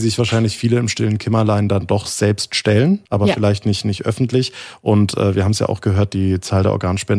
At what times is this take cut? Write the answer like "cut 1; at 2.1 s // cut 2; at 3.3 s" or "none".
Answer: cut 1; at 3.1 s